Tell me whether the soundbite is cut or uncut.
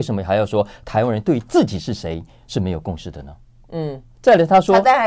cut